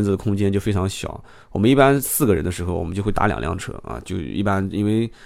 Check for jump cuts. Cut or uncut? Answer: uncut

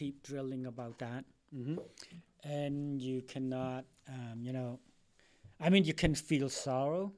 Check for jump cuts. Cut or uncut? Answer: uncut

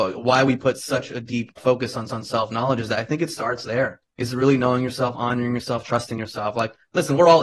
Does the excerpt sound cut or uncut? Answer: cut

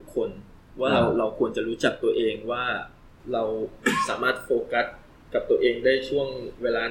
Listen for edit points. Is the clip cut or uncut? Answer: uncut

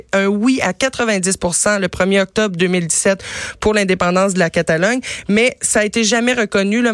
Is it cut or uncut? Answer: uncut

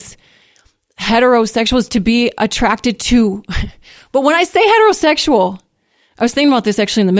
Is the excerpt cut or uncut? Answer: uncut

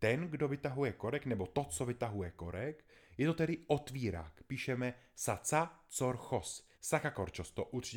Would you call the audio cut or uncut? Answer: cut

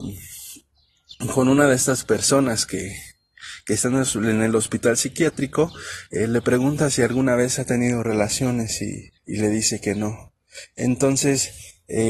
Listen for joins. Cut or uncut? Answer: cut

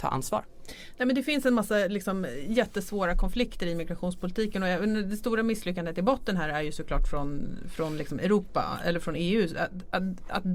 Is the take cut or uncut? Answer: uncut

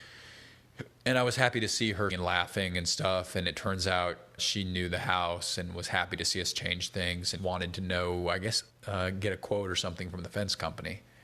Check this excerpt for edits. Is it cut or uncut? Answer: cut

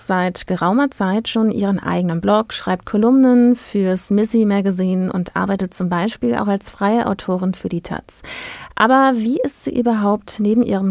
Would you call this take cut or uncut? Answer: uncut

